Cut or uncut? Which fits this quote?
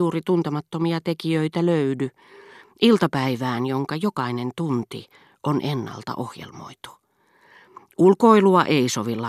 uncut